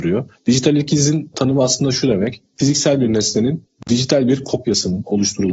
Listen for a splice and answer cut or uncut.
uncut